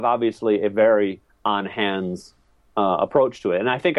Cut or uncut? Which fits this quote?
uncut